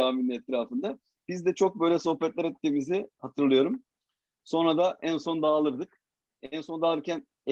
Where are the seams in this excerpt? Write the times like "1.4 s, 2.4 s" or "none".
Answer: none